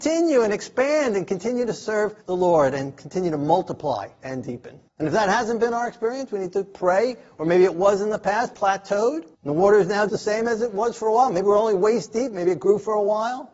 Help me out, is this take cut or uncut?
cut